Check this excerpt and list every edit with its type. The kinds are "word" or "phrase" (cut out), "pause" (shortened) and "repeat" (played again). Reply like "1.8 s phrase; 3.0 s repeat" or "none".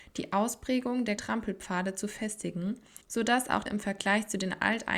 1.2 s word; 3.0 s pause; 3.7 s word